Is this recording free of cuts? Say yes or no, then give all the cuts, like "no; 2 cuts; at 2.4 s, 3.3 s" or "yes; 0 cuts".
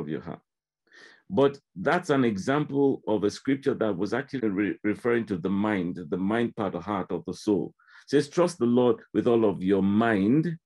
no; 2 cuts; at 4.4 s, 6.7 s